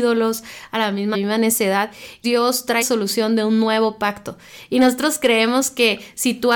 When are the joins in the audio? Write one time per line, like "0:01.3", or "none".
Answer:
0:01.1
0:02.2
0:02.8